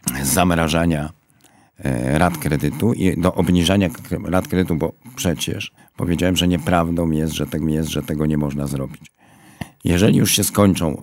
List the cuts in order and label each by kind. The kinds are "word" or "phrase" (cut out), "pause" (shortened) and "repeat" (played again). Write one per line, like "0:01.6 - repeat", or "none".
0:05.8 - pause
0:07.6 - repeat